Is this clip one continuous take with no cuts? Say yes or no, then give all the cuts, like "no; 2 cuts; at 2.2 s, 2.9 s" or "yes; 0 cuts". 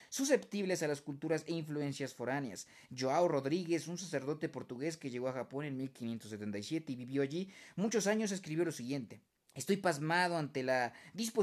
no; 1 cut; at 9.4 s